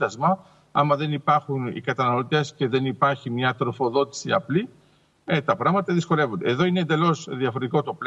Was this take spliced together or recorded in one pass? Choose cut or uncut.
uncut